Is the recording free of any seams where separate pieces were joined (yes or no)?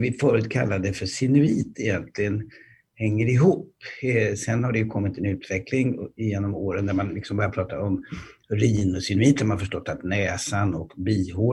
yes